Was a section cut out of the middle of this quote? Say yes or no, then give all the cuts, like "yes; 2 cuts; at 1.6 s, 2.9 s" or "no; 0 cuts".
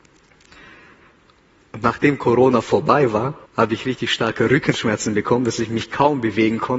yes; 1 cut; at 3.5 s